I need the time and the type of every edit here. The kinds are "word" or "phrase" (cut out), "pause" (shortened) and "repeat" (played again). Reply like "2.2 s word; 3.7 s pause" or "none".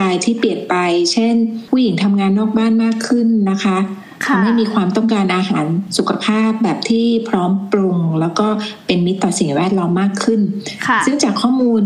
none